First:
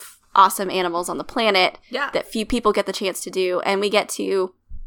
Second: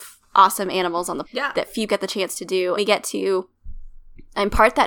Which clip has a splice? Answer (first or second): second